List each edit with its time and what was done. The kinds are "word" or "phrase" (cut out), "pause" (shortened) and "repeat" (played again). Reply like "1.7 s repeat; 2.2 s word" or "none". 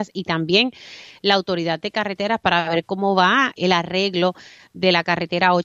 3.6 s word